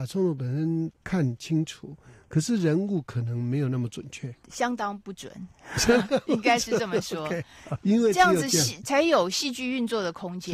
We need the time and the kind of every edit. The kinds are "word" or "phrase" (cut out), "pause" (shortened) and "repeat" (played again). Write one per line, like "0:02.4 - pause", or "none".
0:04.4 - pause
0:07.8 - word